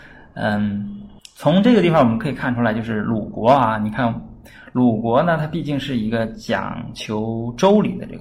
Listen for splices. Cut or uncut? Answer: cut